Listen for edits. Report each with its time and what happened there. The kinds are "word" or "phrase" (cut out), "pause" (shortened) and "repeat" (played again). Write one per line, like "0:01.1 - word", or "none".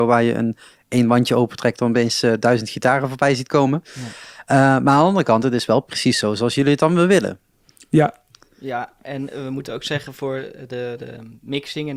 none